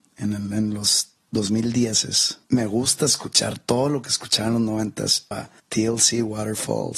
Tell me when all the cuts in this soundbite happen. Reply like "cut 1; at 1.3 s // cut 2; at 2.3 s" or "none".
cut 1; at 2.4 s // cut 2; at 5.3 s